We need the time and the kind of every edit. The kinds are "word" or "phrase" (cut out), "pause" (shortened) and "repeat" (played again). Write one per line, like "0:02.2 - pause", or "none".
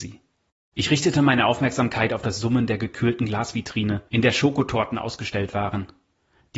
none